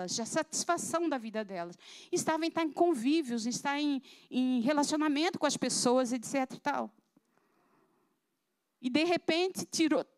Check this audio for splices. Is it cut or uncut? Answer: uncut